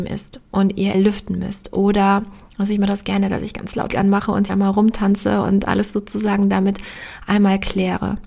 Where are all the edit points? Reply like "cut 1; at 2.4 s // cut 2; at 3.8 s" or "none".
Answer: cut 1; at 0.9 s // cut 2; at 3.9 s // cut 3; at 4.5 s